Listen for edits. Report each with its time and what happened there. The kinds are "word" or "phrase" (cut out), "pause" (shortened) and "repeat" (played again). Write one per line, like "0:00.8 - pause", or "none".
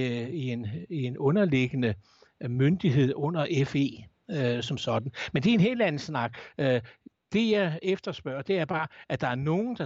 none